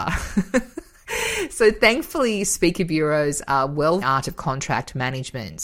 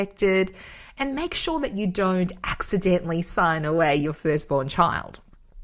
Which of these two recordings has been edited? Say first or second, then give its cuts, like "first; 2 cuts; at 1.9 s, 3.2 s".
first; 1 cut; at 4.0 s